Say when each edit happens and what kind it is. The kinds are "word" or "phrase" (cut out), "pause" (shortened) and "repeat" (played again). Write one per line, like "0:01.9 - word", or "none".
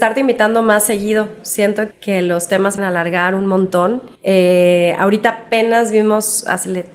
0:01.9 - word
0:02.8 - word
0:04.2 - pause

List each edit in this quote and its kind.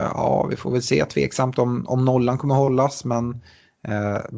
none

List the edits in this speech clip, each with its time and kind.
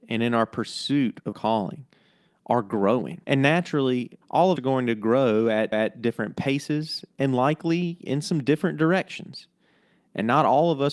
0:01.3 - word
0:03.2 - pause
0:04.2 - pause
0:04.6 - word
0:05.7 - repeat

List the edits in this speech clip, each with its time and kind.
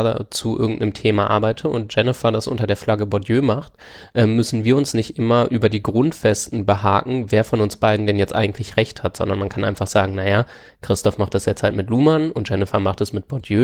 none

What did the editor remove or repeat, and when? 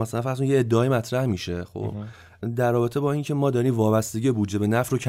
none

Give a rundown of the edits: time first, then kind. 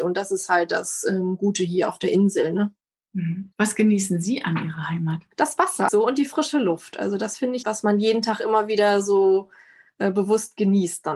0:03.5 - pause
0:05.3 - pause
0:05.9 - word
0:07.6 - phrase

